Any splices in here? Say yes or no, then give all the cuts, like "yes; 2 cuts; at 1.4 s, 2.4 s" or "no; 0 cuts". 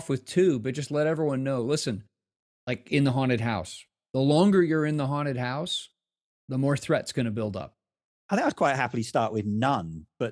no; 0 cuts